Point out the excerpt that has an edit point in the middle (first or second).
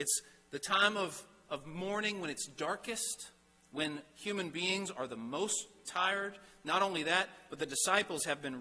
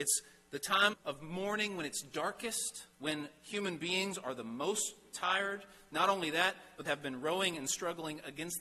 second